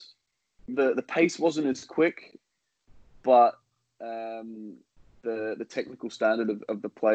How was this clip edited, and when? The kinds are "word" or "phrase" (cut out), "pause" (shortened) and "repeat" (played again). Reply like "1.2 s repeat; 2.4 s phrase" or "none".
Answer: none